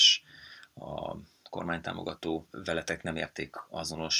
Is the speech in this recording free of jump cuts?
no; 1 cut; at 2.5 s

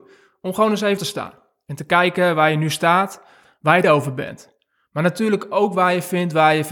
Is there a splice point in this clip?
yes; 2 cuts; at 1.0 s, 3.8 s

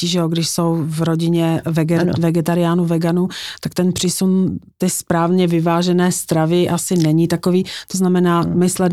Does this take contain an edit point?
no; 0 cuts

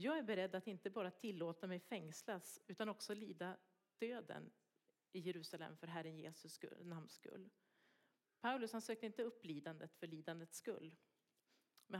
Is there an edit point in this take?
no; 0 cuts

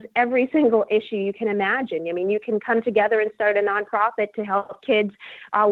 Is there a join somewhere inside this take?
no; 0 cuts

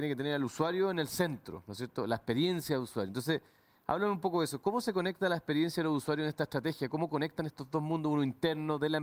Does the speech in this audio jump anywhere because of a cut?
no; 0 cuts

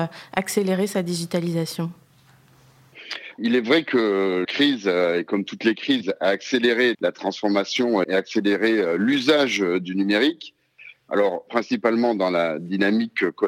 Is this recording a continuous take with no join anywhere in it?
no; 5 cuts; at 3.4 s, 4.4 s, 6.9 s, 8.0 s, 11.5 s

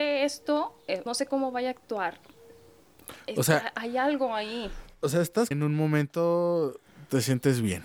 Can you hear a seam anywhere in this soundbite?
yes; 2 cuts; at 1.1 s, 5.5 s

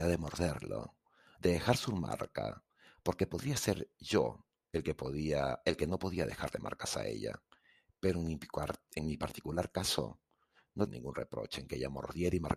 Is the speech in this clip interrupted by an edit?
yes; 1 cut; at 10.9 s

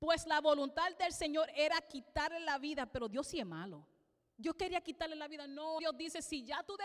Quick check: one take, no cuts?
no; 1 cut; at 5.8 s

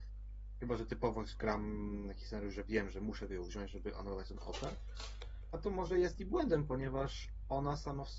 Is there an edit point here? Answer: no; 0 cuts

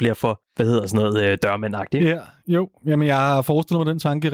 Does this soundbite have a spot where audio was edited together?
no; 0 cuts

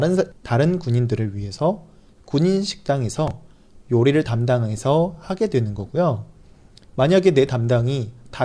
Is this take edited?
no; 0 cuts

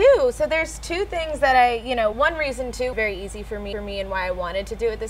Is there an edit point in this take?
yes; 3 cuts; at 2.1 s, 2.9 s, 3.7 s

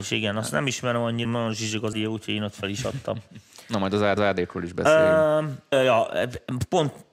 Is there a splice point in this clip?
yes; 4 cuts; at 1.2 s, 1.9 s, 4.2 s, 5.7 s

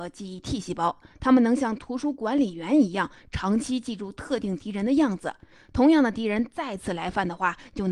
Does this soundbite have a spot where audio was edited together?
no; 0 cuts

